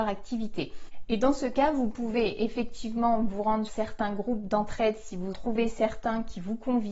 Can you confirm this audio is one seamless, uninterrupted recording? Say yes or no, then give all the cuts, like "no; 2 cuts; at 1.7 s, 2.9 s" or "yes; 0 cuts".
no; 2 cuts; at 3.7 s, 5.3 s